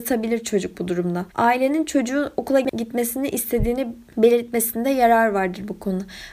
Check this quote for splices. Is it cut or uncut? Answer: cut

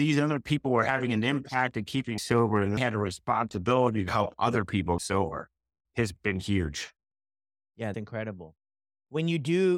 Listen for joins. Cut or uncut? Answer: cut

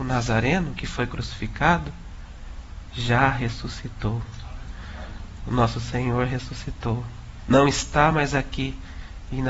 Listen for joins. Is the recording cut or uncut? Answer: uncut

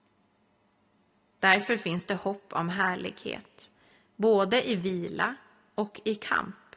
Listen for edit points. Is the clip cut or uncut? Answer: uncut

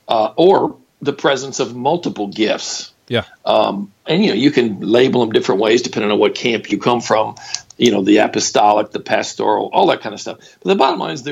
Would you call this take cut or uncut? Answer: cut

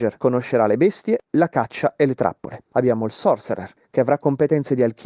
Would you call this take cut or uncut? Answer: cut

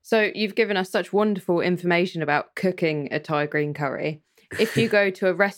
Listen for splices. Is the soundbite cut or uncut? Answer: uncut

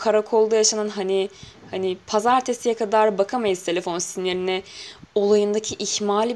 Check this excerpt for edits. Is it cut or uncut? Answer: uncut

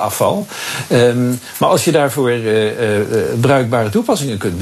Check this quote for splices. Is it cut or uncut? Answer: uncut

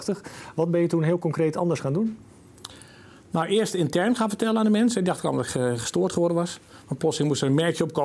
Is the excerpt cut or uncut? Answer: uncut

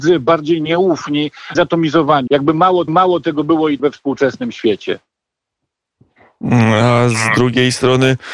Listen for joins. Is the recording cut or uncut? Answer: cut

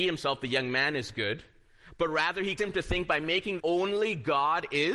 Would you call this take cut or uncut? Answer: cut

